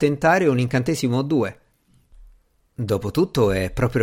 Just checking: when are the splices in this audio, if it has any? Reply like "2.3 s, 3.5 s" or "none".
none